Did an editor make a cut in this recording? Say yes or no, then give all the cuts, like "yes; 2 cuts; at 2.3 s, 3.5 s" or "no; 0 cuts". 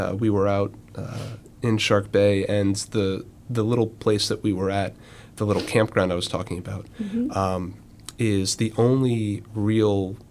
no; 0 cuts